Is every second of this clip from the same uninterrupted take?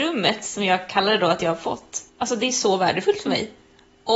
no; 1 cut; at 2.1 s

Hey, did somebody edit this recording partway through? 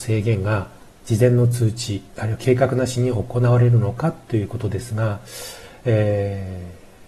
yes; 1 cut; at 2.1 s

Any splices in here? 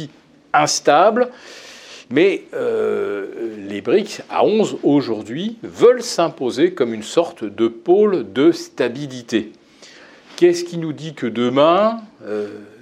no; 0 cuts

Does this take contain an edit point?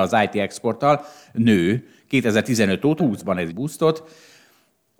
yes; 2 cuts; at 3.0 s, 3.5 s

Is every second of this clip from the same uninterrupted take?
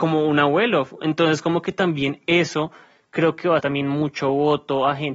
no; 1 cut; at 3.6 s

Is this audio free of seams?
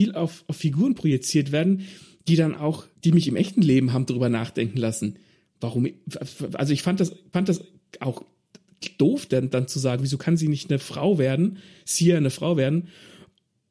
no; 2 cuts; at 2.9 s, 7.3 s

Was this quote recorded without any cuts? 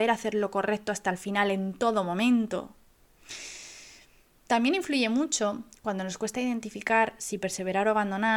yes; 0 cuts

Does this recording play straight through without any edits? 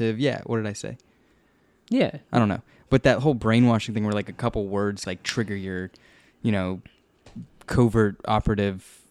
no; 1 cut; at 5.0 s

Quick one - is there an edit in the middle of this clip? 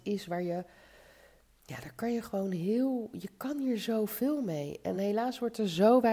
no; 0 cuts

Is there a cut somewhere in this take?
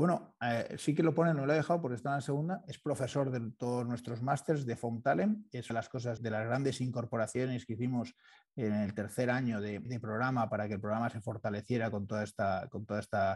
yes; 4 cuts; at 5.7 s, 6.2 s, 9.9 s, 10.5 s

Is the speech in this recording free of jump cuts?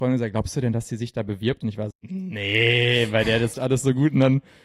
no; 2 cuts; at 1.9 s, 3.5 s

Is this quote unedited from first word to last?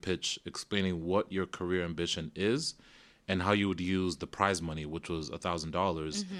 yes; 0 cuts

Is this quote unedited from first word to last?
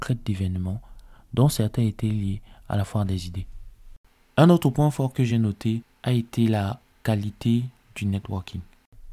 yes; 0 cuts

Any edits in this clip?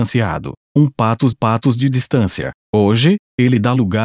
yes; 1 cut; at 1.3 s

